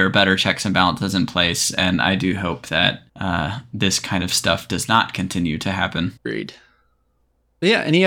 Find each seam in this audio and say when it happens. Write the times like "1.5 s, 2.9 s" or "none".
3.1 s, 6.2 s